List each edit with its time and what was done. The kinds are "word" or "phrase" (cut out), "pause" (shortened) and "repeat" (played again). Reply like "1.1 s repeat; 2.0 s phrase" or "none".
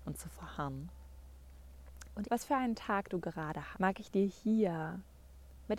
2.2 s word; 3.7 s word